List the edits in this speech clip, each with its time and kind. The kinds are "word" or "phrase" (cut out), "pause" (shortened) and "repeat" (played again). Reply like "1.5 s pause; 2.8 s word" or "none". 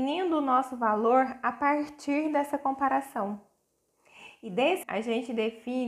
4.8 s word